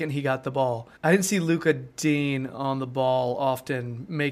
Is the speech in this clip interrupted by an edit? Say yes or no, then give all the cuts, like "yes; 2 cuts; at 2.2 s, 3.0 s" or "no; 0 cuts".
yes; 1 cut; at 1.0 s